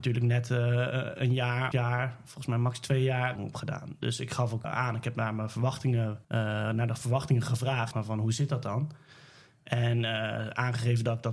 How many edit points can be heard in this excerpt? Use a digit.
5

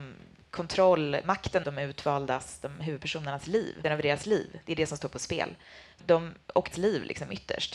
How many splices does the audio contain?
4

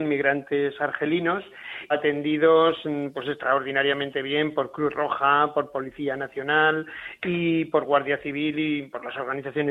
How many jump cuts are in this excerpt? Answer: 1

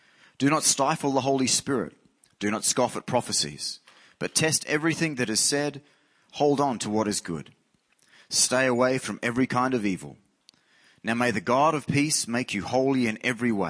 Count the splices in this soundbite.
0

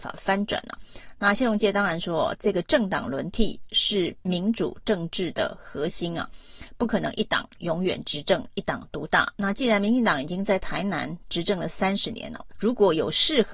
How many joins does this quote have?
1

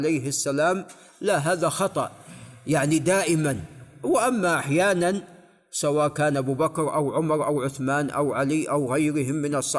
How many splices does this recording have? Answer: 0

